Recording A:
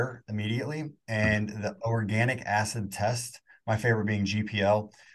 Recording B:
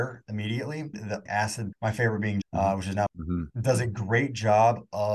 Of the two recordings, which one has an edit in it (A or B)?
B